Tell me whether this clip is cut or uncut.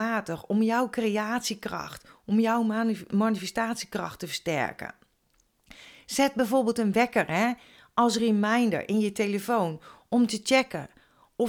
uncut